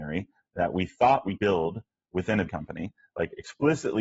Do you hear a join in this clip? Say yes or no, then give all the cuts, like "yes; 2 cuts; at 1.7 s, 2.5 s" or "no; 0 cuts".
yes; 2 cuts; at 1.4 s, 2.5 s